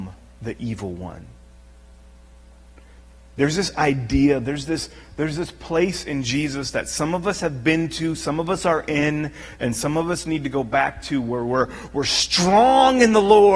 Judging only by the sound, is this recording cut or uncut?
uncut